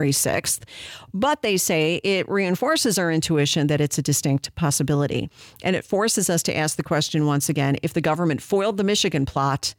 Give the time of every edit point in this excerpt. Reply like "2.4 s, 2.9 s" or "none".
none

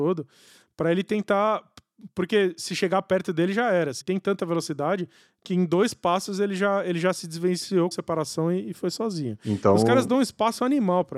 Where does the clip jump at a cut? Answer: 4.0 s, 7.9 s

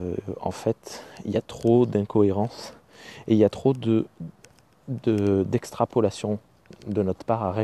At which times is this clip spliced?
none

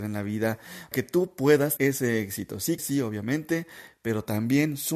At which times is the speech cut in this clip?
0.9 s, 1.8 s, 2.8 s

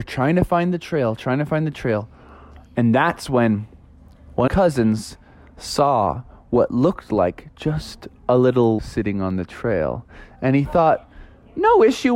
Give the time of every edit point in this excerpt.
4.5 s, 8.8 s

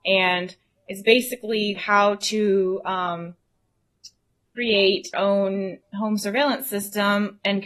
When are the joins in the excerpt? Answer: 1.7 s, 5.1 s, 5.8 s

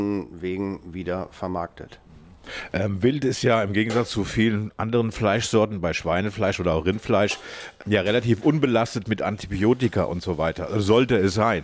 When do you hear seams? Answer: none

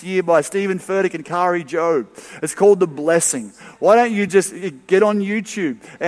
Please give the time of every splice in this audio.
none

